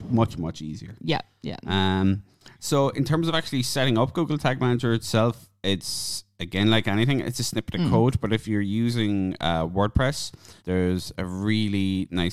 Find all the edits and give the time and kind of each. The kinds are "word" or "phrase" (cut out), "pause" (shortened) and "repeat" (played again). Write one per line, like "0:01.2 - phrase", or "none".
0:10.6 - pause